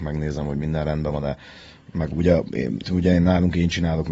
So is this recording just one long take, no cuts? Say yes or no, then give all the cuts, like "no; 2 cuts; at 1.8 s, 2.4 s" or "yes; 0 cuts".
no; 1 cut; at 2.8 s